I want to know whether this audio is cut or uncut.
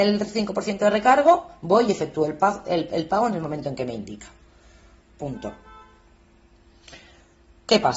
uncut